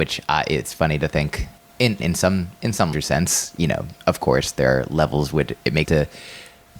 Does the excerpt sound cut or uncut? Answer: cut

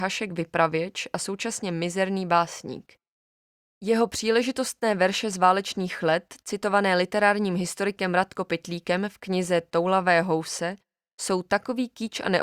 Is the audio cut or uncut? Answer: uncut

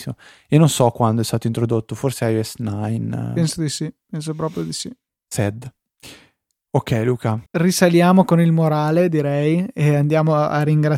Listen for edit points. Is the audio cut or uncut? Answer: cut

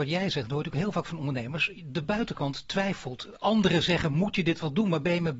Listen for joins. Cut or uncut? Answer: uncut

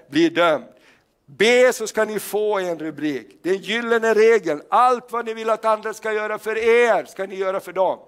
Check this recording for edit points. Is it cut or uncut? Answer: uncut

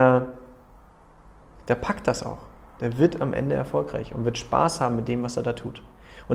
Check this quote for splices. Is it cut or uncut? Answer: uncut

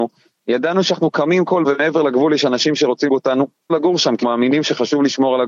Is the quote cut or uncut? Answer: cut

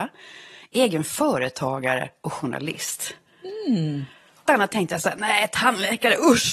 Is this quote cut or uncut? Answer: cut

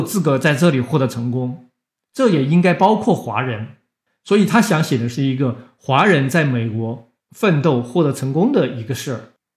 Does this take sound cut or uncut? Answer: uncut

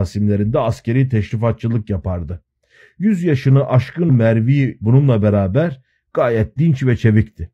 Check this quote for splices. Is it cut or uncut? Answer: cut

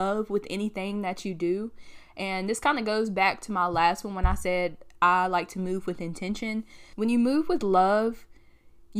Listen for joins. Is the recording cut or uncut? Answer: uncut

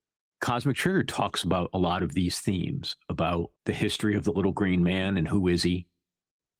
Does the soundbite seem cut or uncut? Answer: cut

